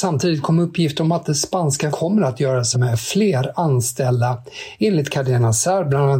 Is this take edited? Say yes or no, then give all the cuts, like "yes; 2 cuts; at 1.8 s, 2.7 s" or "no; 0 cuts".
yes; 2 cuts; at 1.9 s, 2.7 s